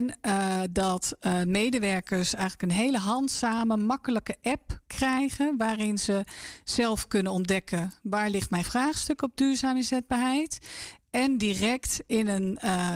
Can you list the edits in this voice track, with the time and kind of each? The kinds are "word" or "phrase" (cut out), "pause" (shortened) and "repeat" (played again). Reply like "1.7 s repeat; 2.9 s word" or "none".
8.6 s word